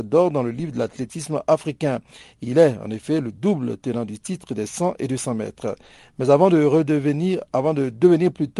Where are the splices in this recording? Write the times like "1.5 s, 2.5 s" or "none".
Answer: none

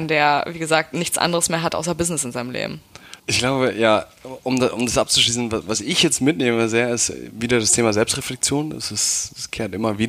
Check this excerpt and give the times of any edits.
3.2 s

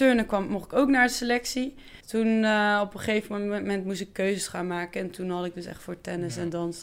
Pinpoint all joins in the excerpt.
2.0 s

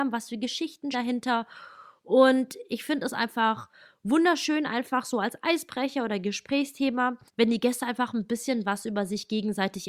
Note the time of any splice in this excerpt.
0.9 s, 7.3 s

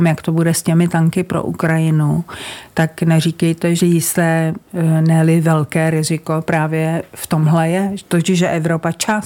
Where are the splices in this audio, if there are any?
3.8 s

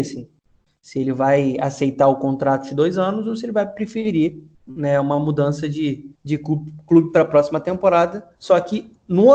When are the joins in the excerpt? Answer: 4.5 s, 6.2 s, 8.3 s

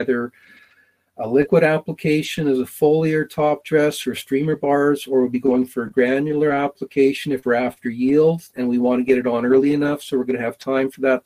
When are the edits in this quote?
none

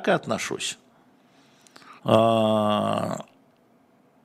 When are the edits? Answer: 2.0 s

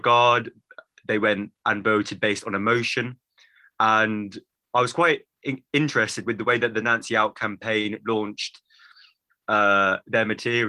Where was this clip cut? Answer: none

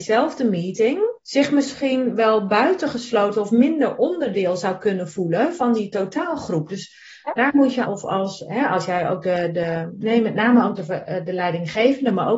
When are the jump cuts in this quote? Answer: 1.2 s, 7.9 s

